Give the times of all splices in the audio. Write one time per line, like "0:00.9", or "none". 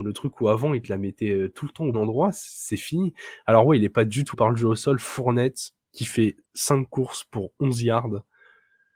0:01.9
0:04.3
0:05.8
0:06.4